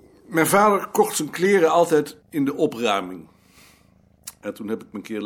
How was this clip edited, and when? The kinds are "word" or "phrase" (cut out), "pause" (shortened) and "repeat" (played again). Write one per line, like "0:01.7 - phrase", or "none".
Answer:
0:02.2 - pause